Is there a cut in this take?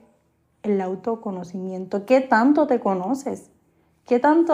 no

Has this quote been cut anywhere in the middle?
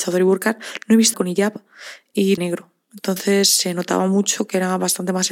yes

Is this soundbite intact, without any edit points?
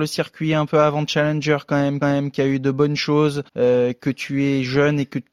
no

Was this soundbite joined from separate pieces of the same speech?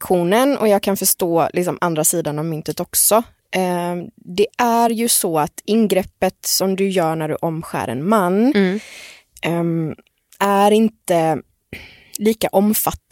no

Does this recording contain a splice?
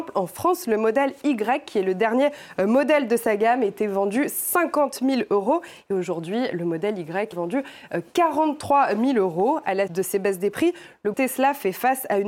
yes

